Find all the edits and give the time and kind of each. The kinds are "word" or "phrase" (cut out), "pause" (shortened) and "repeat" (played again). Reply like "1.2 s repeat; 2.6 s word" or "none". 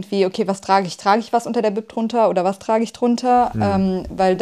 none